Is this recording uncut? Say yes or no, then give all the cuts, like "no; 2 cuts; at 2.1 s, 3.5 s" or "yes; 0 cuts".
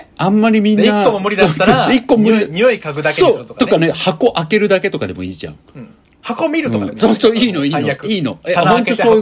yes; 0 cuts